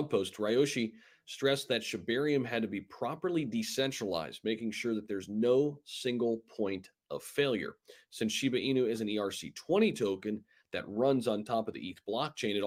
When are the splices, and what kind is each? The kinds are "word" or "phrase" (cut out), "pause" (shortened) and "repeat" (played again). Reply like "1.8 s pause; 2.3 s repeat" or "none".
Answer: none

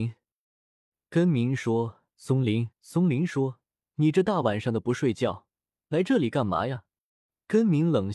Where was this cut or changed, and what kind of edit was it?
2.7 s pause

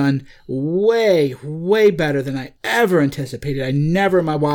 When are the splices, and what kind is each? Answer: 2.6 s pause

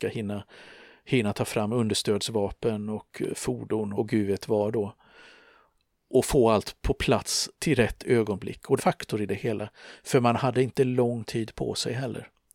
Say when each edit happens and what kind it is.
4.0 s word; 7.5 s pause; 8.8 s phrase

